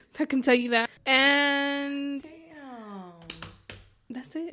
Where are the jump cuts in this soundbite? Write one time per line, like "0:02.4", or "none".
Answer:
none